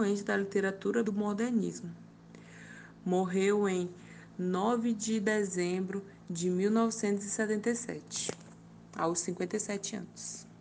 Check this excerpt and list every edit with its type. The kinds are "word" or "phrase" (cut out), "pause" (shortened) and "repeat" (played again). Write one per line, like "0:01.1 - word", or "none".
0:01.0 - phrase